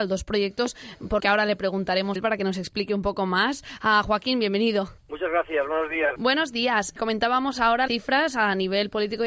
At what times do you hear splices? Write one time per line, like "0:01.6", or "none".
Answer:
0:01.2
0:02.2
0:05.0
0:07.9